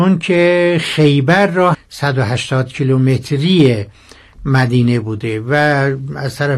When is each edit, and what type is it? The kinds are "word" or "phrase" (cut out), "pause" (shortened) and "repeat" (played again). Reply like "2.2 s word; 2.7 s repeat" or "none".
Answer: 1.7 s phrase